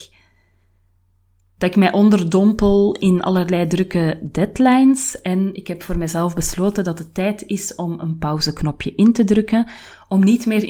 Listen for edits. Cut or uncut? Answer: uncut